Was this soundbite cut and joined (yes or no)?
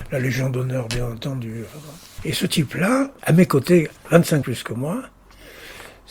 yes